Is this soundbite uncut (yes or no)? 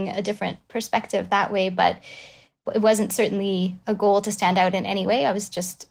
yes